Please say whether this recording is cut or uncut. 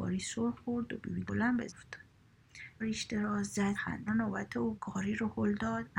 cut